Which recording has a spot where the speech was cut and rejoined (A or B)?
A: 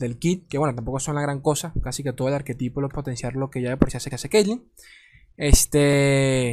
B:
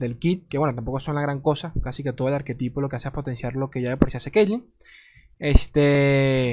A